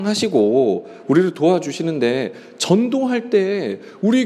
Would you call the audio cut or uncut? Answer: uncut